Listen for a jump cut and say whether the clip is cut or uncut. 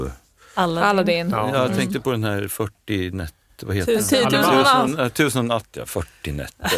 uncut